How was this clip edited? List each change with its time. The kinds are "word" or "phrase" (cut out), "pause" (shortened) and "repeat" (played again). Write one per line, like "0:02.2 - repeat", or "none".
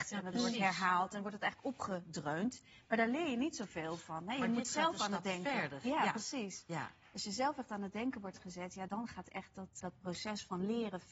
0:08.9 - word
0:09.8 - word